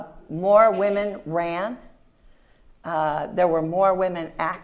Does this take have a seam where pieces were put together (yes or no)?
no